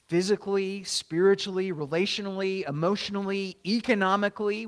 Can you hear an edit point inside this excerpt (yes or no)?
no